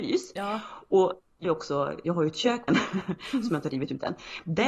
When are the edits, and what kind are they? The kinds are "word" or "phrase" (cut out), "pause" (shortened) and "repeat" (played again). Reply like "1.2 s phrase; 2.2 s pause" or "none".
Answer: 1.4 s word; 2.1 s word; 2.7 s phrase